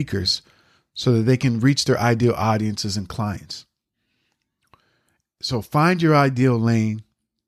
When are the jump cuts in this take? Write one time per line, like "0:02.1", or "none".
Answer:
none